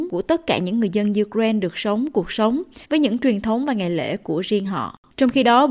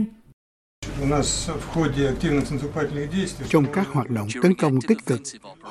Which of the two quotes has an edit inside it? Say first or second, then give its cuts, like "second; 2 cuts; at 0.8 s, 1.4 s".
first; 1 cut; at 2.8 s